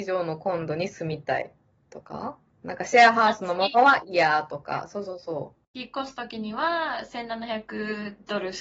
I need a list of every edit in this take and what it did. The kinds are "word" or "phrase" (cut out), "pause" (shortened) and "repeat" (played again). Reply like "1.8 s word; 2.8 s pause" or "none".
5.6 s pause